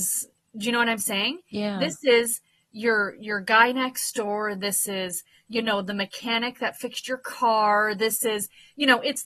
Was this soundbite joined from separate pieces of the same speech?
no; 0 cuts

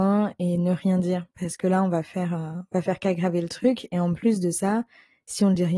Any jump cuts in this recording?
no; 0 cuts

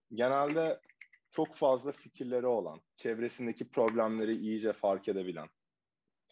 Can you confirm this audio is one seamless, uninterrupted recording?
no; 1 cut; at 2.9 s

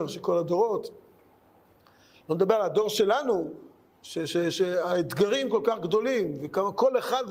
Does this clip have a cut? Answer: no; 0 cuts

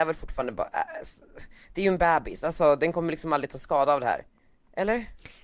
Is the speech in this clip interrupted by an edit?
no; 0 cuts

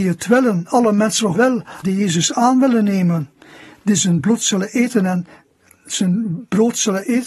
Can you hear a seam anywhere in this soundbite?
yes; 2 cuts; at 1.3 s, 1.8 s

